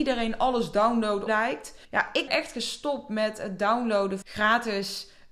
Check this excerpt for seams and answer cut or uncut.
cut